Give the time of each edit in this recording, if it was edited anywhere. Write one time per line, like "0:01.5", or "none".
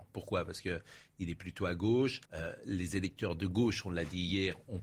0:02.2